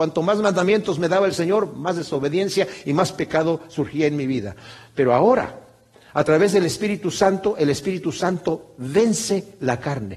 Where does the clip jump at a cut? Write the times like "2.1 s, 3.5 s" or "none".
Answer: none